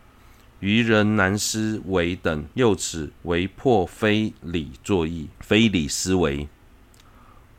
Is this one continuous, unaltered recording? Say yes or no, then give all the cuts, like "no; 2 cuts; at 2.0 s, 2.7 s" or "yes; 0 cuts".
no; 3 cuts; at 2.5 s, 3.2 s, 5.3 s